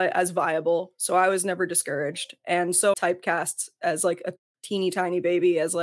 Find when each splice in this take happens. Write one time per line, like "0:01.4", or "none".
0:02.9